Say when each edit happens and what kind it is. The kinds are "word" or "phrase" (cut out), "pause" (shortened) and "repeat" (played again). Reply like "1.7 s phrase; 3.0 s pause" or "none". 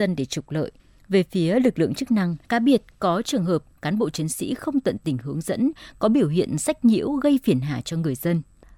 2.4 s pause